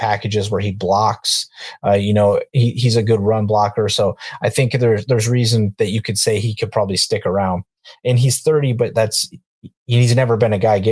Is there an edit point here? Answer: no; 0 cuts

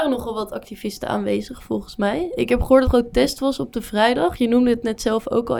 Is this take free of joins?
no; 1 cut; at 2.8 s

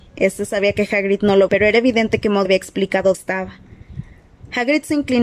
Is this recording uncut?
no; 3 cuts; at 1.5 s, 2.5 s, 3.1 s

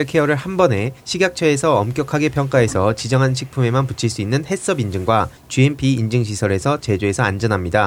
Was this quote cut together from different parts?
yes; 2 cuts; at 1.0 s, 5.4 s

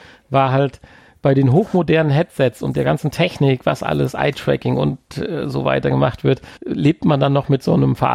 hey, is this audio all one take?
no; 1 cut; at 6.6 s

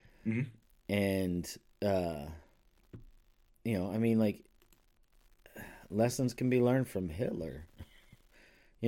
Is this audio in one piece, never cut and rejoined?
yes; 0 cuts

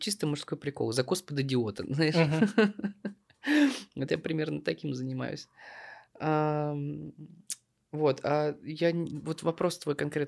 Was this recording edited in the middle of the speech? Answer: no; 0 cuts

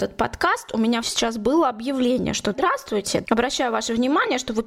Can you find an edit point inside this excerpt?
yes; 3 cuts; at 1.0 s, 2.5 s, 3.2 s

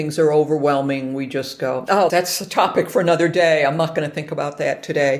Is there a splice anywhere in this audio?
yes; 1 cut; at 2.1 s

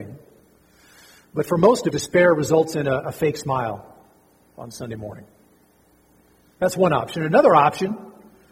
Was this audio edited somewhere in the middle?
yes; 1 cut; at 1.9 s

